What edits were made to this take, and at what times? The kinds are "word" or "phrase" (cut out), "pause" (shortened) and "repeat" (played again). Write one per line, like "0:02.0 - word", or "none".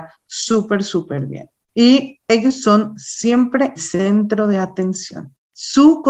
0:03.8 - word